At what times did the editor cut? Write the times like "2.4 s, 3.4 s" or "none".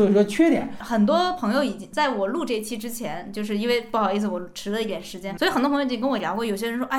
5.4 s